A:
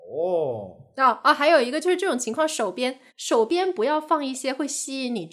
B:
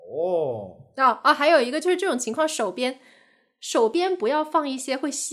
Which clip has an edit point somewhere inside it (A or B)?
A